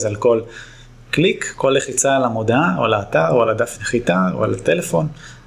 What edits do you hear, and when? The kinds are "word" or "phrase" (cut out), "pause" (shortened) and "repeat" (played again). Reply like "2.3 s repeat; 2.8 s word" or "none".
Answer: none

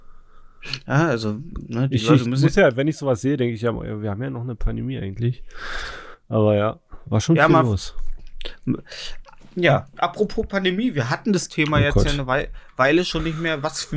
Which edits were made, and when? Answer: none

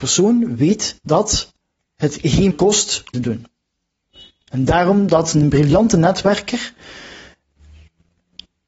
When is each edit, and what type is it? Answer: 1.6 s pause; 2.5 s word; 3.1 s phrase

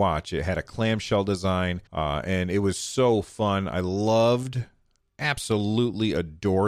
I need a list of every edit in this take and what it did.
1.9 s pause

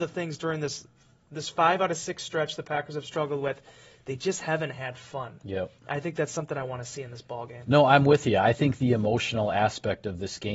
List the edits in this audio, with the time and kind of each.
none

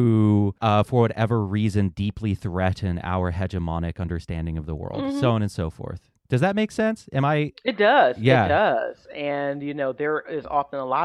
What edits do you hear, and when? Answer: none

